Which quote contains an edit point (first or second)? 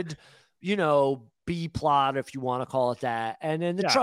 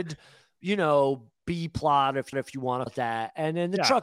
second